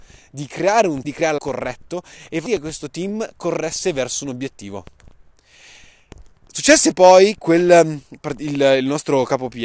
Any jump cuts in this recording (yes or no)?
yes